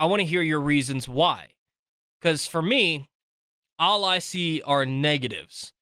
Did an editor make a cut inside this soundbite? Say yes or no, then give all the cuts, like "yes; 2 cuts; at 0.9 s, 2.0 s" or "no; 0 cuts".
no; 0 cuts